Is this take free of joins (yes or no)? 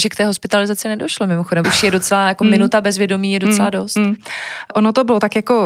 no